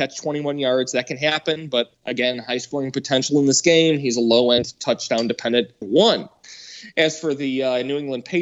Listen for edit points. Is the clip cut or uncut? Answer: cut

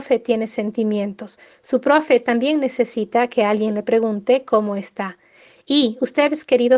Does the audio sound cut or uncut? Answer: uncut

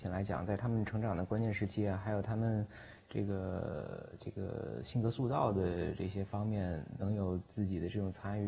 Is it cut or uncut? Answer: cut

